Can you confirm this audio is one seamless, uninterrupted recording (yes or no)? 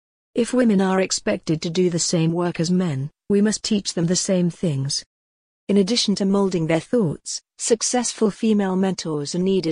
yes